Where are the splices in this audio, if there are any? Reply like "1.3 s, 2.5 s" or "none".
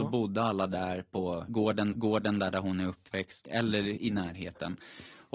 1.9 s